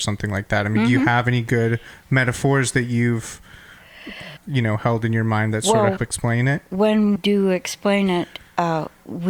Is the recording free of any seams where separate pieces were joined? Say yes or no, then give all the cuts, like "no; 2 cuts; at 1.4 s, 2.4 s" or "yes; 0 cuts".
no; 3 cuts; at 4.4 s, 6.0 s, 7.2 s